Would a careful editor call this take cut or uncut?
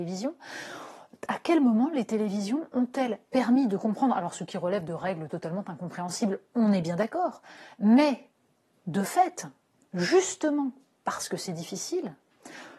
uncut